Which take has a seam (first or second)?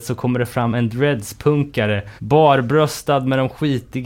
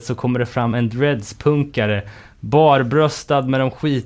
first